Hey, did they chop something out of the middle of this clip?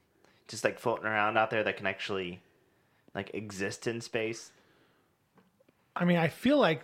no; 0 cuts

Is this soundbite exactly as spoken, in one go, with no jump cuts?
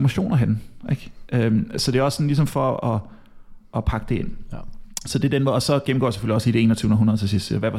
yes; 0 cuts

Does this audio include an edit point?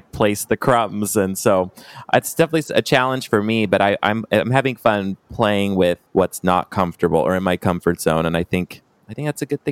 yes; 1 cut; at 6.1 s

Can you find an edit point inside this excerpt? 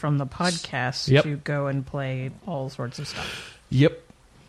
yes; 1 cut; at 2.4 s

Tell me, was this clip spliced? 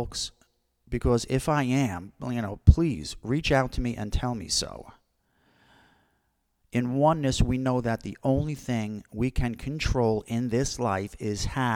no; 0 cuts

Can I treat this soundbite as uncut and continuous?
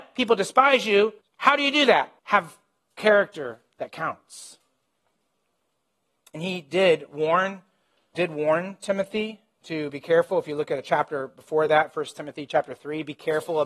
no; 3 cuts; at 1.2 s, 2.2 s, 8.1 s

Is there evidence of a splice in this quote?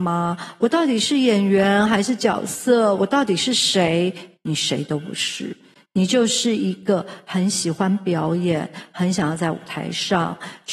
no; 0 cuts

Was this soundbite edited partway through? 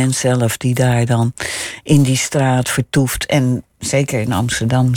no; 0 cuts

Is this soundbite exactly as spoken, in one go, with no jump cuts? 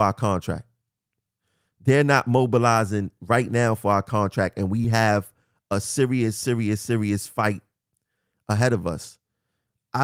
yes; 0 cuts

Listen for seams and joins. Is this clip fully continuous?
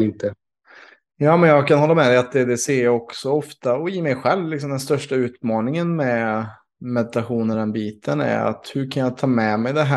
yes; 0 cuts

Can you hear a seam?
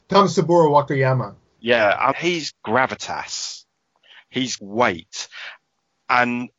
yes; 4 cuts; at 1.5 s, 2.1 s, 2.5 s, 4.6 s

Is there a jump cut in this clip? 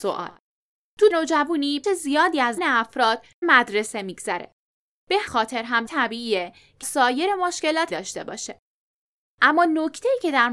yes; 8 cuts; at 1.1 s, 1.8 s, 2.6 s, 3.4 s, 5.3 s, 5.9 s, 6.8 s, 7.9 s

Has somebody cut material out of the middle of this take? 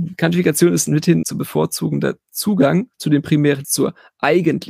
yes; 3 cuts; at 1.2 s, 2.9 s, 3.6 s

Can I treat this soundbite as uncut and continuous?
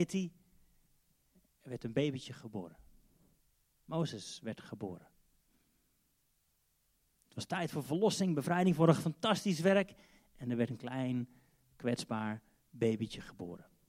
yes; 0 cuts

